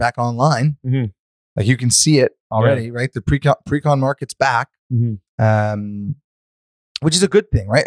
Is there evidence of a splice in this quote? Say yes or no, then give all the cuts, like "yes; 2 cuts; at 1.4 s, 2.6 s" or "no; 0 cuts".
yes; 1 cut; at 5.3 s